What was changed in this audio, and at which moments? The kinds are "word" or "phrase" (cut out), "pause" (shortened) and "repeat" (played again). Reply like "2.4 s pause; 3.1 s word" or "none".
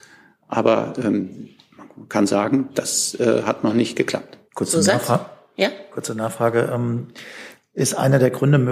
4.5 s pause